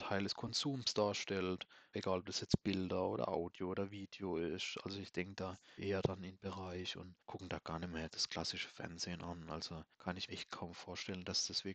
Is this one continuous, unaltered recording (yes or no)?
no